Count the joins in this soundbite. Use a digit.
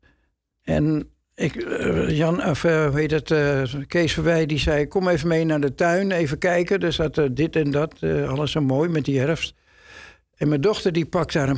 0